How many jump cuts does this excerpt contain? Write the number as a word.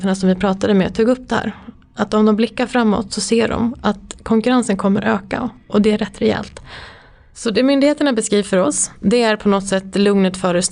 zero